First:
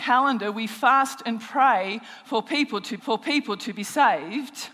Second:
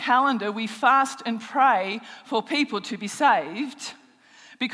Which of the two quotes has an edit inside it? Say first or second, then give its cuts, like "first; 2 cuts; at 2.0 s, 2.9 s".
first; 1 cut; at 3.0 s